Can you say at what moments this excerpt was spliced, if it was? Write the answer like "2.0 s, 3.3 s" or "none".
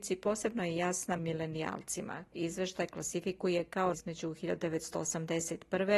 1.2 s, 2.3 s, 3.9 s